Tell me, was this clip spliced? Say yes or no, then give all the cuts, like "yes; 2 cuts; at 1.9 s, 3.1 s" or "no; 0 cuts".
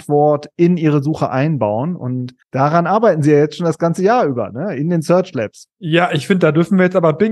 yes; 1 cut; at 2.4 s